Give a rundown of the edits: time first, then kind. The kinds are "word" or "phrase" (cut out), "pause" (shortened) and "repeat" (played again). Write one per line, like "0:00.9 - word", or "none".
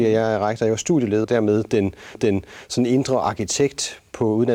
0:01.2 - phrase
0:02.1 - repeat